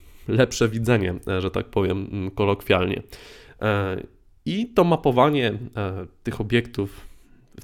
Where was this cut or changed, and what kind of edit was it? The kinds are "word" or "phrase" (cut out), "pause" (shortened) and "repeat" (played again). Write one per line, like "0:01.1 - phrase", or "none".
none